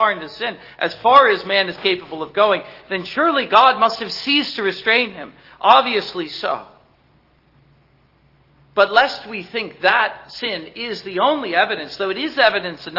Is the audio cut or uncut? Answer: uncut